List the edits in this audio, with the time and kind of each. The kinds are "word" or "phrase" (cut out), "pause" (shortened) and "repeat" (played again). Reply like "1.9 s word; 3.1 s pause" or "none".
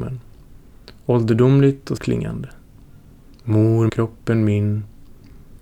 2.0 s word; 3.9 s word